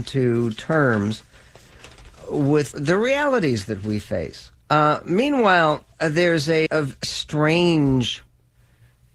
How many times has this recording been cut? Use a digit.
5